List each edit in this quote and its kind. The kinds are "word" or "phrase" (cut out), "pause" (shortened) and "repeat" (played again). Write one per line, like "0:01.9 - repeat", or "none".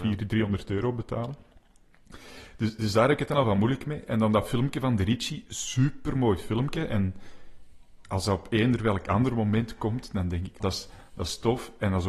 0:10.6 - word